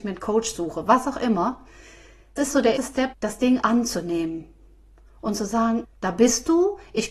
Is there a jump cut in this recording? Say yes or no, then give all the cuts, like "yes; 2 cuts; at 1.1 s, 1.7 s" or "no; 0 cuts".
yes; 5 cuts; at 2.4 s, 2.8 s, 3.1 s, 3.6 s, 5.8 s